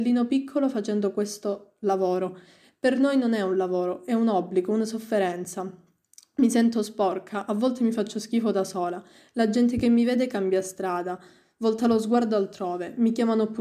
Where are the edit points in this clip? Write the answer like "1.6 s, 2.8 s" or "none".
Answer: none